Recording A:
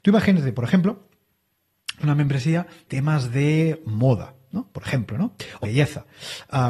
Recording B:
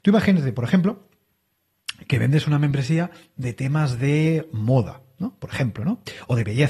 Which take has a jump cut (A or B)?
A